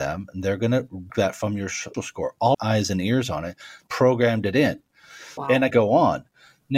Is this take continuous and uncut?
no; 6 cuts; at 1.1 s, 1.9 s, 2.5 s, 3.9 s, 5.4 s, 5.7 s

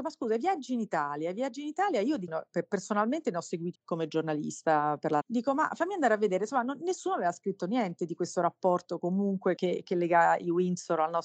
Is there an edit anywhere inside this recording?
yes; 4 cuts; at 2.3 s, 3.7 s, 5.2 s, 9.6 s

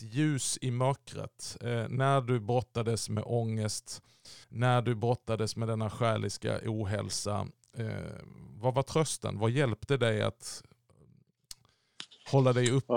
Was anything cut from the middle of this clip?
yes; 1 cut; at 4.4 s

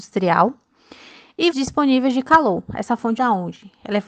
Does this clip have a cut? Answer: yes; 2 cuts; at 1.5 s, 3.2 s

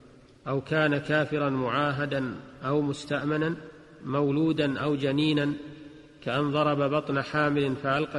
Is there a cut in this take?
no; 0 cuts

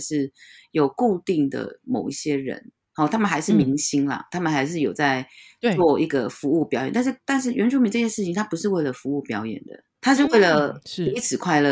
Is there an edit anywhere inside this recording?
no; 0 cuts

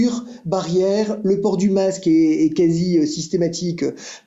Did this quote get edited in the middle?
no; 0 cuts

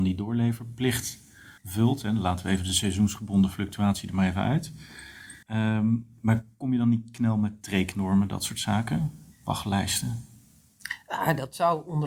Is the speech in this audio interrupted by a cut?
yes; 3 cuts; at 1.6 s, 5.4 s, 9.3 s

